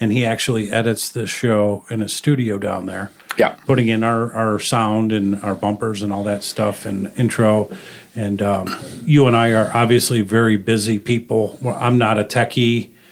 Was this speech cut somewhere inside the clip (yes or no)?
no